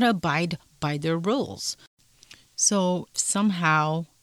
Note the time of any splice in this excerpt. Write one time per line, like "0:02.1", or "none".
0:03.1